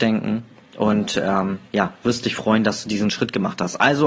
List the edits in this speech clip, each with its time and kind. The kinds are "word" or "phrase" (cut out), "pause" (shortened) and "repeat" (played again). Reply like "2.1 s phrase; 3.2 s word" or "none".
none

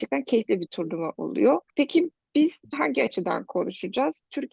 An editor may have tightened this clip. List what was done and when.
1.7 s pause; 2.7 s word

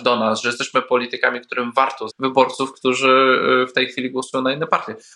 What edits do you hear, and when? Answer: 2.1 s word

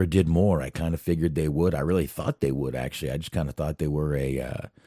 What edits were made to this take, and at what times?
none

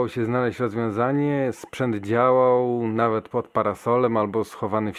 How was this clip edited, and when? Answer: none

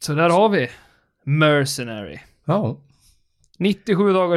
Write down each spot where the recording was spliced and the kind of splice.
none

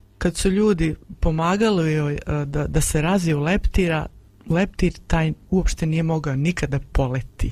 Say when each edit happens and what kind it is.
none

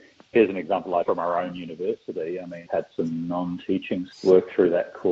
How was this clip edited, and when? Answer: 1.0 s word; 2.7 s word; 4.1 s word

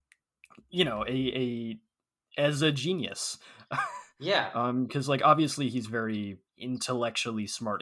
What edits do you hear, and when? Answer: 6.5 s pause

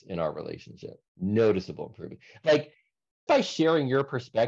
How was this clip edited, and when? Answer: 1.1 s pause; 3.3 s word

